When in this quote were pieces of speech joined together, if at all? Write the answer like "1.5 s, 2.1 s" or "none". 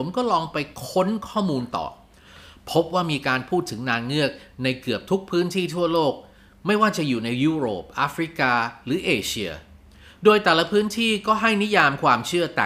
none